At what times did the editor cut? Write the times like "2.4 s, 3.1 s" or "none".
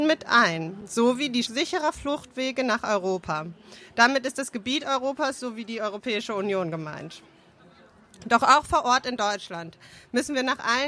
1.5 s